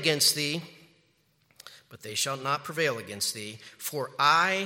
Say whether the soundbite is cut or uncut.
uncut